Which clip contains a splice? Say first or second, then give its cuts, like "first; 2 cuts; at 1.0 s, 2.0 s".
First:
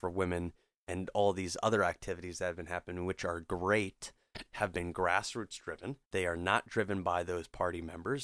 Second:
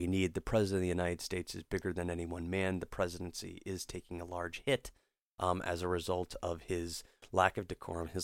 first; 1 cut; at 6.0 s